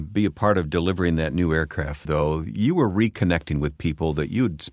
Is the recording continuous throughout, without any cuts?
no; 1 cut; at 2.0 s

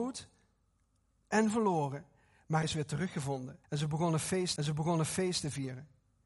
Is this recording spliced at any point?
yes; 3 cuts; at 2.6 s, 3.6 s, 4.6 s

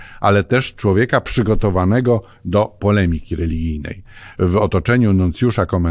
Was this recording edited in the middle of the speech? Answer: no; 0 cuts

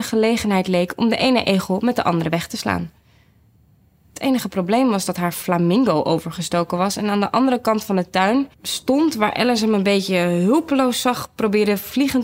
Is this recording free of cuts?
no; 1 cut; at 8.5 s

